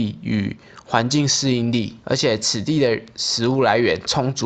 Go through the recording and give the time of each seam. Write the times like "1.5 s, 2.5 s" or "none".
2.0 s